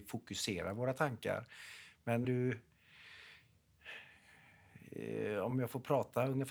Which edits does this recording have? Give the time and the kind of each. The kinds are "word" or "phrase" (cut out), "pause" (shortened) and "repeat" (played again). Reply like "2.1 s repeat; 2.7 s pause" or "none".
2.2 s word; 5.5 s word

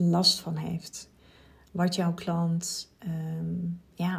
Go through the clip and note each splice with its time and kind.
none

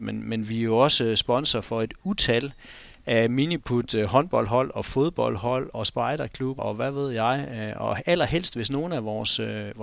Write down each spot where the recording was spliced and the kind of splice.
5.7 s word; 6.6 s word

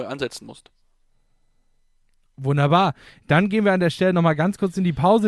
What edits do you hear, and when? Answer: none

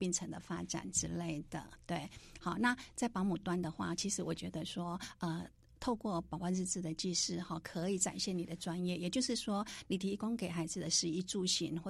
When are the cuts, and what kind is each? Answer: none

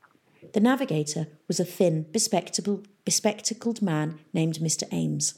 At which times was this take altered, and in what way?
none

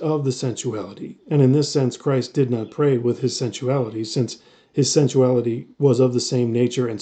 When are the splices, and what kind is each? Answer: none

